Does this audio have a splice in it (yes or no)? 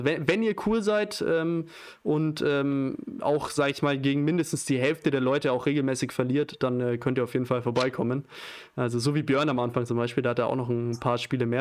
no